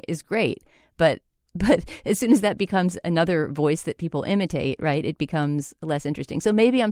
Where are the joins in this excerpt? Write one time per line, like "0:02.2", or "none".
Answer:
none